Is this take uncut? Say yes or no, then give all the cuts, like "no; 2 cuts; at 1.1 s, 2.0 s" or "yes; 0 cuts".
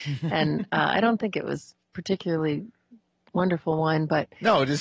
yes; 0 cuts